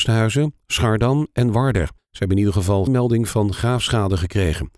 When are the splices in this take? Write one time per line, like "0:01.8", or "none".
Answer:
0:02.0
0:02.9